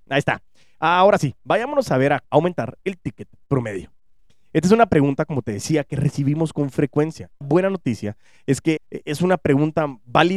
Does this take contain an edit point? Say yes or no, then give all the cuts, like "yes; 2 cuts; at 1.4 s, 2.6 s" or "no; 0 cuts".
yes; 3 cuts; at 2.2 s, 7.4 s, 8.8 s